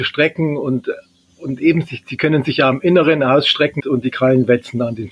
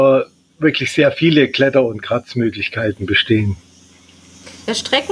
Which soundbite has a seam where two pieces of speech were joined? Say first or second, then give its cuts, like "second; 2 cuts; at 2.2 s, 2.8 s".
first; 1 cut; at 3.8 s